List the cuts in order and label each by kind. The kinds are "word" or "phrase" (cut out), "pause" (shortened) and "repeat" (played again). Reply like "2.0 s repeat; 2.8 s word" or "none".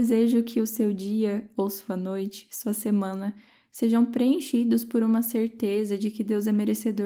none